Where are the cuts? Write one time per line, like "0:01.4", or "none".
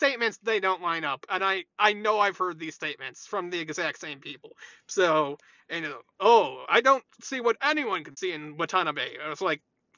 none